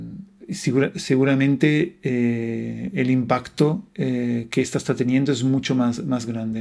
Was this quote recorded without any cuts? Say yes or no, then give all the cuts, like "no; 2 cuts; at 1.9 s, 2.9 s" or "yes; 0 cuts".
no; 1 cut; at 3.9 s